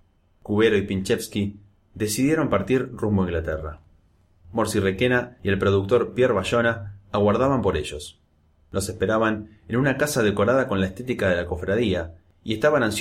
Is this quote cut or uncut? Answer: uncut